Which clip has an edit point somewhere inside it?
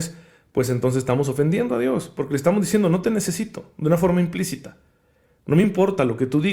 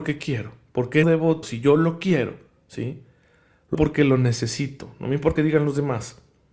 second; 4 cuts; at 1.0 s, 1.4 s, 3.7 s, 5.4 s

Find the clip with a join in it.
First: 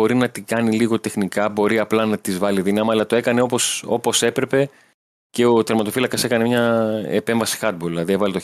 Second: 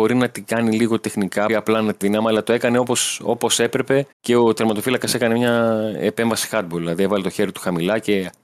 second; 3 cuts; at 1.5 s, 2.0 s, 4.1 s

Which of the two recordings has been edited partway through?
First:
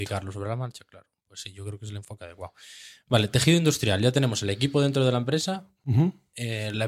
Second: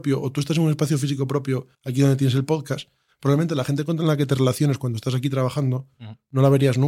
second; 1 cut; at 1.7 s

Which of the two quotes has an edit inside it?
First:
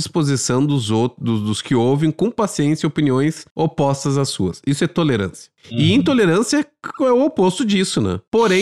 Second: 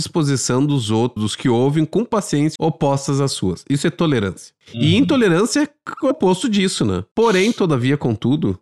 second; 3 cuts; at 1.2 s, 2.6 s, 6.1 s

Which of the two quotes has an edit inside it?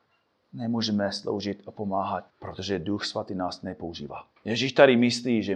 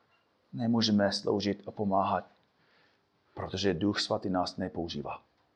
first; 2 cuts; at 2.3 s, 4.4 s

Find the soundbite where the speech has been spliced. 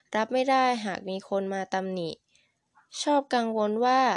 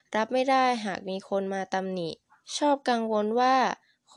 second; 1 cut; at 2.2 s

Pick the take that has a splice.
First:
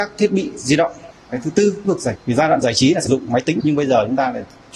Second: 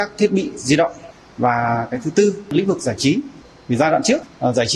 first; 6 cuts; at 1.3 s, 1.8 s, 2.2 s, 2.6 s, 3.1 s, 3.6 s

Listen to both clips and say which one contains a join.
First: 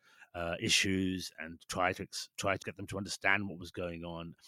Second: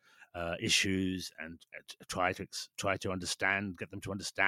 first; 2 cuts; at 1.7 s, 2.6 s

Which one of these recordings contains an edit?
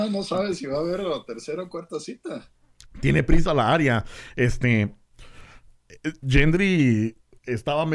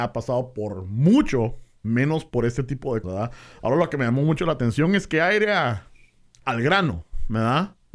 second; 1 cut; at 3.0 s

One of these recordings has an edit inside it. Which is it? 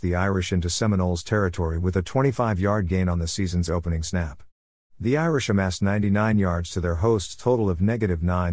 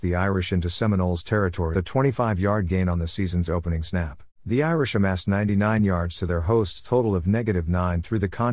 second; 2 cuts; at 1.7 s, 4.3 s

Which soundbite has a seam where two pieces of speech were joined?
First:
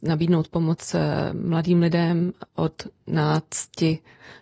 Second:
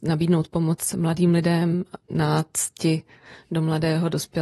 second; 2 cuts; at 0.9 s, 2.0 s

